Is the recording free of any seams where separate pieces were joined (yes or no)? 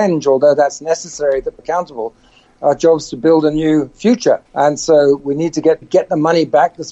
no